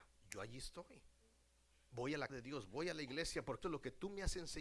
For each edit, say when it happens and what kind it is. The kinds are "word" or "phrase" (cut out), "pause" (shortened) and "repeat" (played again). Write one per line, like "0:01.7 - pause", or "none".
0:02.3 - word
0:03.6 - word